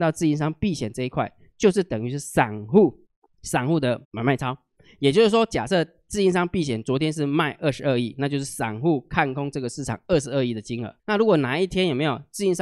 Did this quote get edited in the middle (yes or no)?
yes